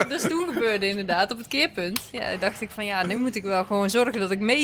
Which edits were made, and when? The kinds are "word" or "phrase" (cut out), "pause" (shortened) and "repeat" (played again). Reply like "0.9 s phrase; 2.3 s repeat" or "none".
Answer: none

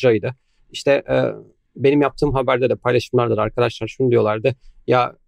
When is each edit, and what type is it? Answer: none

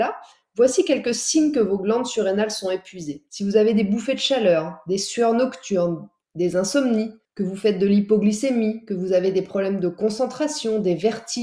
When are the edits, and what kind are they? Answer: 3.3 s pause

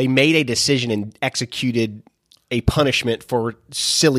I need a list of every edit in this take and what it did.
none

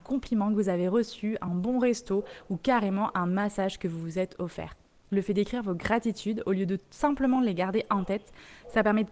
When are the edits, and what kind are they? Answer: none

